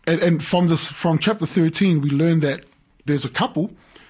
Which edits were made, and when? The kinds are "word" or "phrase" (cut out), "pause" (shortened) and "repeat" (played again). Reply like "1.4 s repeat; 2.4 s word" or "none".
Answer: 3.1 s word

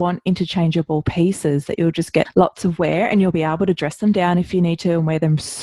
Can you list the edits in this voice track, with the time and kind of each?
none

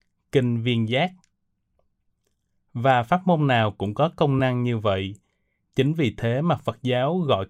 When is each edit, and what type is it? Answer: none

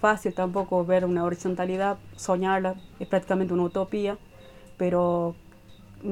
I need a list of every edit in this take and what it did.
2.9 s pause

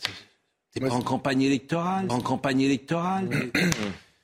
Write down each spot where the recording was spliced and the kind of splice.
2.1 s repeat

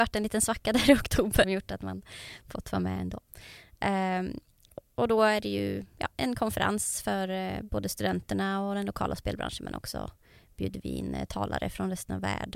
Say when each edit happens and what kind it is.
1.4 s word

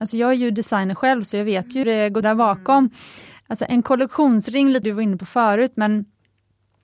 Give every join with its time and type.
1.8 s word; 2.2 s word; 4.8 s word

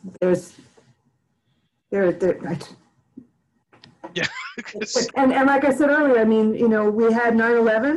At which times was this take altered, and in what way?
5.1 s word

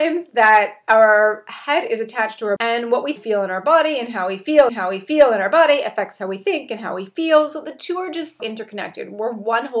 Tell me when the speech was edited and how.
2.6 s word; 3.2 s phrase; 4.7 s repeat; 8.4 s word

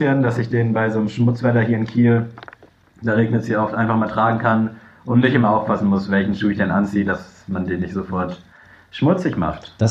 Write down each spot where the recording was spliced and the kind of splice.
none

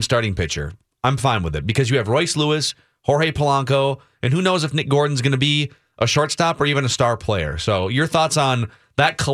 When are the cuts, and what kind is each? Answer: none

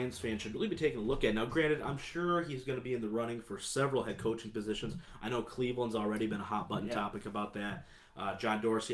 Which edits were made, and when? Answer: none

